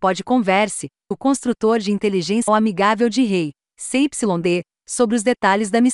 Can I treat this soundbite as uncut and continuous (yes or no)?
no